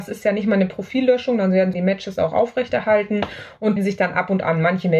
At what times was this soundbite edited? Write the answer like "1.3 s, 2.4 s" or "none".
1.7 s, 3.8 s